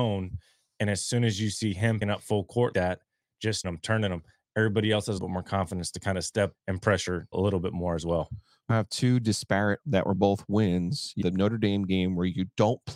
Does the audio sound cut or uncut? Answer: cut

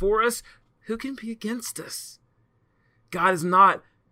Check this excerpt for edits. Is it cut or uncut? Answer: uncut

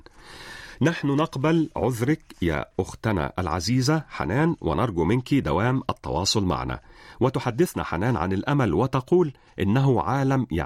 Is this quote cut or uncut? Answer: uncut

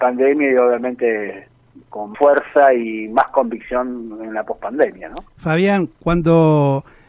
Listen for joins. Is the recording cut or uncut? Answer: cut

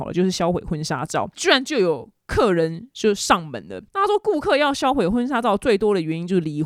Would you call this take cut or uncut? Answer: cut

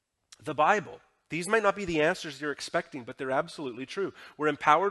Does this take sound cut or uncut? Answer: uncut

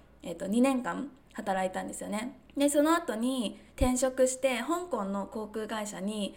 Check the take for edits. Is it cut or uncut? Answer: cut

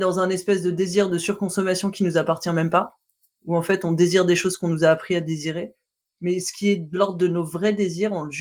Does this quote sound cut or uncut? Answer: uncut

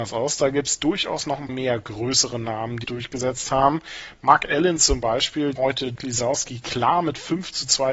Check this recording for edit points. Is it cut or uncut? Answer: cut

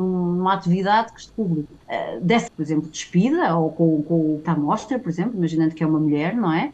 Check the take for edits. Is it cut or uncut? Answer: cut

